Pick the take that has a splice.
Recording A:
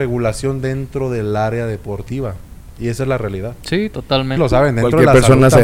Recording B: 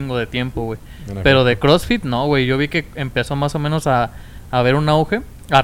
A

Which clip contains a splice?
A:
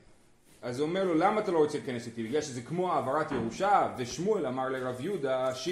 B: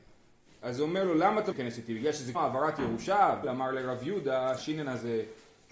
B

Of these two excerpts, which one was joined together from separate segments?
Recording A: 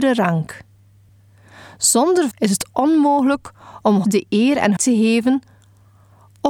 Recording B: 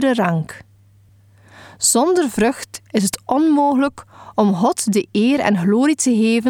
A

